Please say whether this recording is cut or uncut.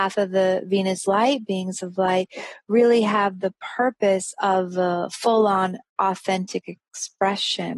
uncut